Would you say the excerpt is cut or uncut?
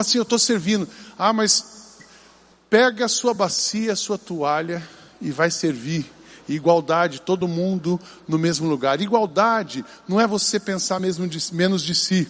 uncut